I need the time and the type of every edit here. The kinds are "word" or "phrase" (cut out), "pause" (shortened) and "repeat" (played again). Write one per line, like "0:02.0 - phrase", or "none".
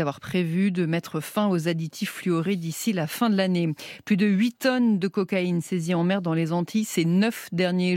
none